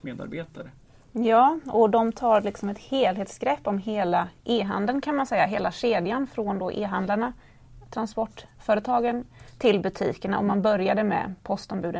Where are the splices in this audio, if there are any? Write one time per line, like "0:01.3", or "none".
0:04.4